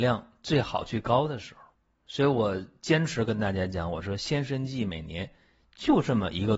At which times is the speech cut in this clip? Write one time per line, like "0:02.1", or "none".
0:01.7